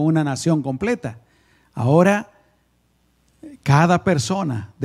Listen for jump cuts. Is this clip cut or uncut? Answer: uncut